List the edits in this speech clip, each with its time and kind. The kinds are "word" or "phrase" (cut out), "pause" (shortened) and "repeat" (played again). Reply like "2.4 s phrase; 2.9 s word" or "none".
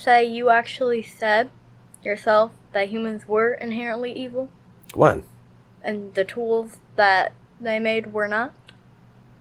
none